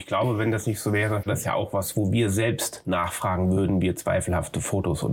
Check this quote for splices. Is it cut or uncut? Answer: cut